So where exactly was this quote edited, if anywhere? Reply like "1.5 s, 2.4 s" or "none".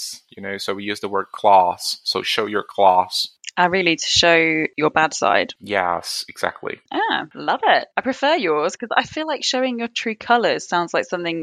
7.9 s